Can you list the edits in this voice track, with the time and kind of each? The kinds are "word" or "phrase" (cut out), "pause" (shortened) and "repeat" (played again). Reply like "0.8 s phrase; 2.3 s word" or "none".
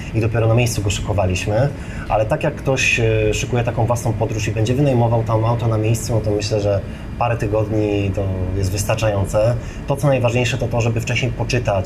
none